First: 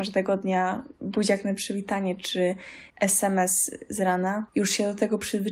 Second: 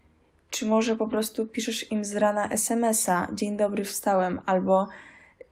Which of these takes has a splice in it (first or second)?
first